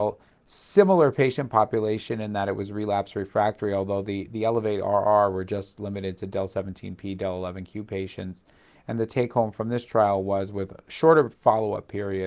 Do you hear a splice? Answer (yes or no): no